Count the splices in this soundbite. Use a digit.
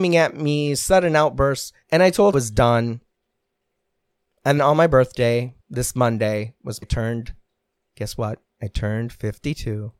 6